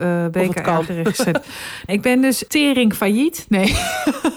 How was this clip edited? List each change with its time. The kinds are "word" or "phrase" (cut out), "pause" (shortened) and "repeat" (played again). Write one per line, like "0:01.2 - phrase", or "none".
0:01.9 - word
0:02.5 - word